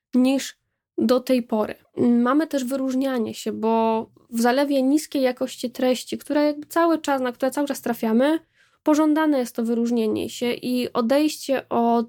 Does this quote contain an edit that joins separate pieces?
yes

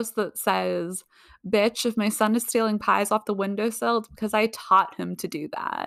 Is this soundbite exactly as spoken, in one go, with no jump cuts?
yes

